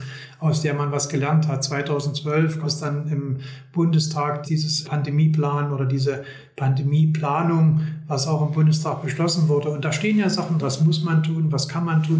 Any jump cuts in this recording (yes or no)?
yes